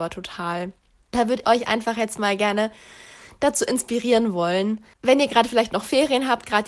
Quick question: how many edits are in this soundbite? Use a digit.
2